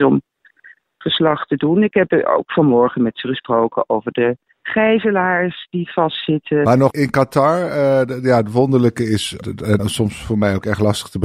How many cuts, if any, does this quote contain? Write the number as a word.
four